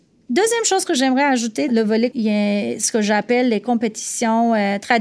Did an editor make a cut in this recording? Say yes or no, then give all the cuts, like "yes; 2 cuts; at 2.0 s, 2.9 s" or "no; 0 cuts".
yes; 2 cuts; at 1.7 s, 2.1 s